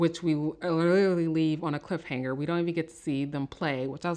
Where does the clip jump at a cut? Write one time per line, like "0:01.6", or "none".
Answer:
none